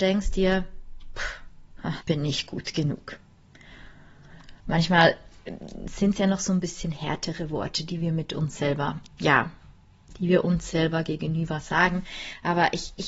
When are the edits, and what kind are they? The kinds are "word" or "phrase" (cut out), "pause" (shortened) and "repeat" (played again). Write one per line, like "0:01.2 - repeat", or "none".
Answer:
0:02.0 - word
0:04.6 - pause
0:09.1 - word